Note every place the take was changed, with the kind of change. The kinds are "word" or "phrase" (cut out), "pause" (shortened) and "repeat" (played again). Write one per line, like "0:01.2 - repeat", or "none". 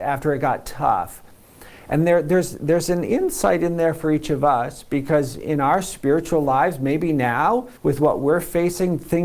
0:07.8 - pause